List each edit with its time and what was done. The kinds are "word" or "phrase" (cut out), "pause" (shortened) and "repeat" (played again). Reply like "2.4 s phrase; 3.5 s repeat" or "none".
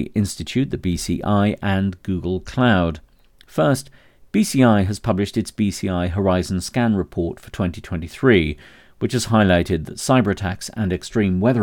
none